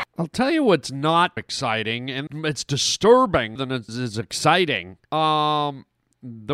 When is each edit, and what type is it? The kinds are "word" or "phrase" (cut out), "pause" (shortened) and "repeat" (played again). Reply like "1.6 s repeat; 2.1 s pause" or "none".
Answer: 1.4 s word; 2.3 s word; 3.6 s word; 3.9 s word; 5.0 s pause